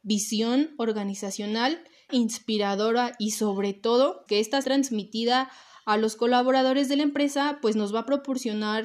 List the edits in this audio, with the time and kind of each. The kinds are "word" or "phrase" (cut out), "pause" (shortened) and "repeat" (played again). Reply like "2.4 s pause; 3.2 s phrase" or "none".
2.1 s phrase; 4.3 s word; 4.6 s word